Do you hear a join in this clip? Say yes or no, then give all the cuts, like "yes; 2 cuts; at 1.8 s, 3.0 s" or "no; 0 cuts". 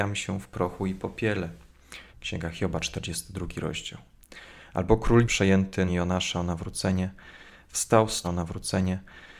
yes; 4 cuts; at 2.1 s, 5.2 s, 5.9 s, 8.2 s